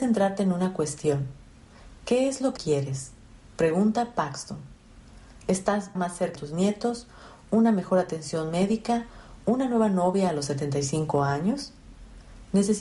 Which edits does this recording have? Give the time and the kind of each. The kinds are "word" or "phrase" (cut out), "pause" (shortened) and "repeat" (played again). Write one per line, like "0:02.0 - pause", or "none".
0:02.6 - word
0:06.0 - word
0:06.4 - word